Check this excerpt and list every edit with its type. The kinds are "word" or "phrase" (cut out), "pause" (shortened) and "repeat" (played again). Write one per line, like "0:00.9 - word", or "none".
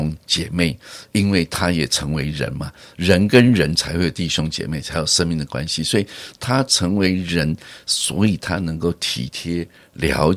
none